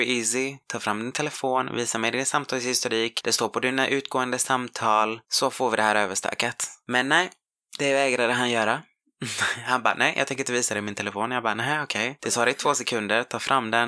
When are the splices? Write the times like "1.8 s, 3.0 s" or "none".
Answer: none